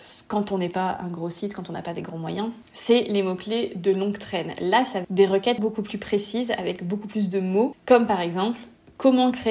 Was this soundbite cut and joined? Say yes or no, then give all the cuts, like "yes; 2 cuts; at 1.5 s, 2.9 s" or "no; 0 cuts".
yes; 2 cuts; at 5.0 s, 5.6 s